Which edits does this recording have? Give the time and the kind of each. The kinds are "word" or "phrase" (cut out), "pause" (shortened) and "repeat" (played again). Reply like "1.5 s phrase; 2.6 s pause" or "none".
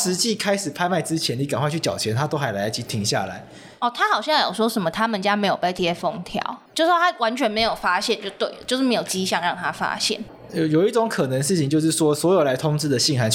6.7 s pause